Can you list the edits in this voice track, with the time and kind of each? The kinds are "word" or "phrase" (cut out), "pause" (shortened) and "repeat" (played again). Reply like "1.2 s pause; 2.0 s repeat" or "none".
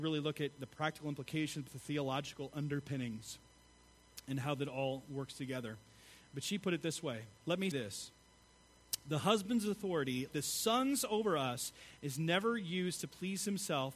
1.7 s word; 7.7 s word; 10.3 s word